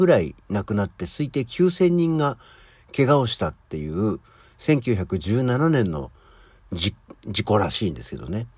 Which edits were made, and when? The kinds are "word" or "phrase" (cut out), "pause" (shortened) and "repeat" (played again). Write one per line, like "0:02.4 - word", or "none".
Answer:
none